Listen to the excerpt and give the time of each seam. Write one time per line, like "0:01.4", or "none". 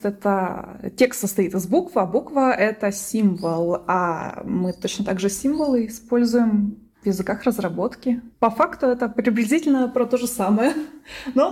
0:08.3

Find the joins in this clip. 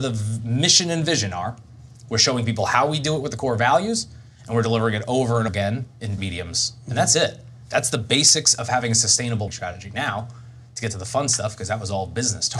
0:05.5
0:06.2
0:09.5

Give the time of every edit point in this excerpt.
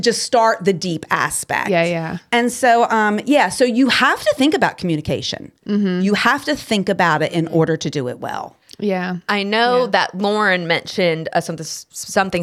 none

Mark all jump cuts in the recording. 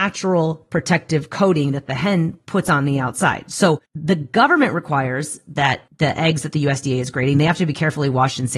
0:03.9
0:05.9

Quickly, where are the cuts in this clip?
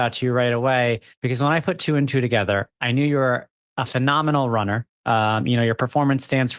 none

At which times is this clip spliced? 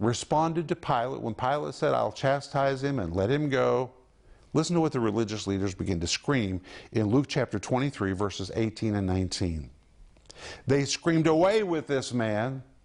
none

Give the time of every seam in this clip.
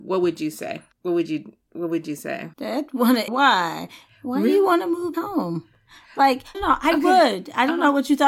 0:00.9
0:02.5
0:03.3
0:05.1
0:06.5

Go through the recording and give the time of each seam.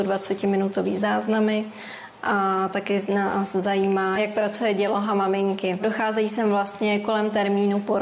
none

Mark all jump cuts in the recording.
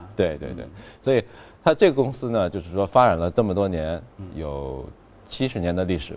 0:04.3

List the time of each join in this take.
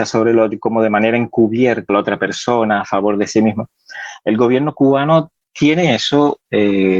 0:01.9

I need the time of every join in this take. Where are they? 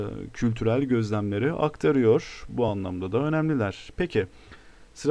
none

